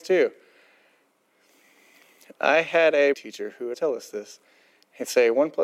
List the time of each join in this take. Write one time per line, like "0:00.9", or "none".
0:03.1
0:03.7